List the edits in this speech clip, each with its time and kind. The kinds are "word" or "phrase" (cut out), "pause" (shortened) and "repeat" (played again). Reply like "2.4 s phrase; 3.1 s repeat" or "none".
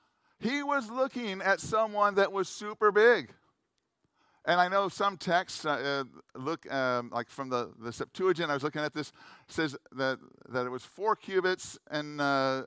none